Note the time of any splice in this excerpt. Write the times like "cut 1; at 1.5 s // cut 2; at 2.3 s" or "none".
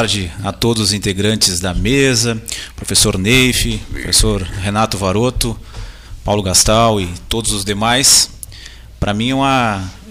none